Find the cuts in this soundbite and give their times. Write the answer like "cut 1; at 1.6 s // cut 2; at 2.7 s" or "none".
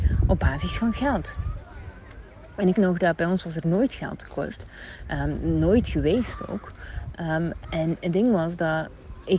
cut 1; at 2.7 s // cut 2; at 7.6 s